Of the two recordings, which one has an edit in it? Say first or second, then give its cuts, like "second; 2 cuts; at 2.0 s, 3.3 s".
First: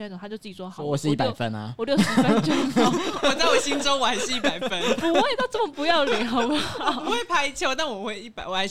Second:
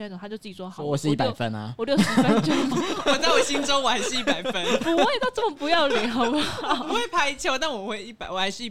second; 1 cut; at 2.7 s